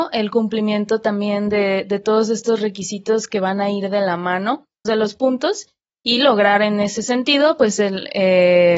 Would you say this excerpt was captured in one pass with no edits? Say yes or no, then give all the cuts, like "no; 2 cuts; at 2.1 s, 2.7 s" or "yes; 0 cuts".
no; 1 cut; at 4.8 s